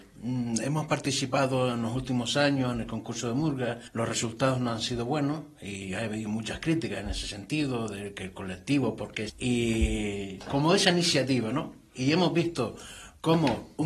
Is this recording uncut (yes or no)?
no